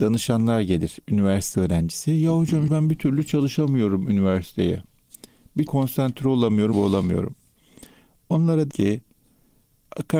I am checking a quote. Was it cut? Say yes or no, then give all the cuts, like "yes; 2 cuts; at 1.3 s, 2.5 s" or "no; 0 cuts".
yes; 5 cuts; at 1.5 s, 2.7 s, 5.7 s, 6.7 s, 8.7 s